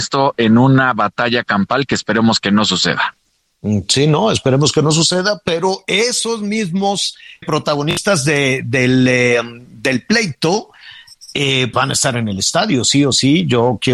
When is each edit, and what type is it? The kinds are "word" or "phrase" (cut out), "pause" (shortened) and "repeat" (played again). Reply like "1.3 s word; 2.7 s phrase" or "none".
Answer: 7.4 s word; 11.7 s word